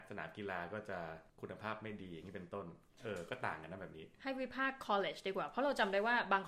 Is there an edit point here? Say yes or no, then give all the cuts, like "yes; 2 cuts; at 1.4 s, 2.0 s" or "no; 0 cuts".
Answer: no; 0 cuts